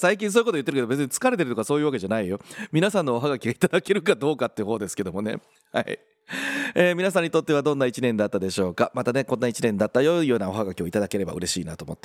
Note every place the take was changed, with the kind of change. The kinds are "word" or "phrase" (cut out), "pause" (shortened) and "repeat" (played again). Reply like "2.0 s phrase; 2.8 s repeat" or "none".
none